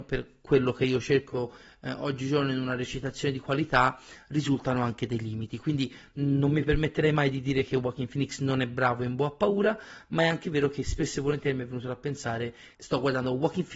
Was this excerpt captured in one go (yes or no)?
no